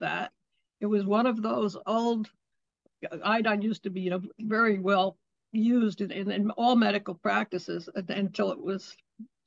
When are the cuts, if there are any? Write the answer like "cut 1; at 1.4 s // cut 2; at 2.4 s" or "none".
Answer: none